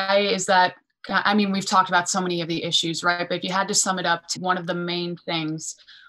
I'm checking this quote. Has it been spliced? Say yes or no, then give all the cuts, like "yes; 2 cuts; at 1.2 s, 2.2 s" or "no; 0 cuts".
yes; 1 cut; at 4.4 s